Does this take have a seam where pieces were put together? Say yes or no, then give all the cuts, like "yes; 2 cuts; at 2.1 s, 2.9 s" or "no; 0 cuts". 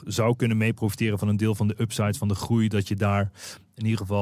no; 0 cuts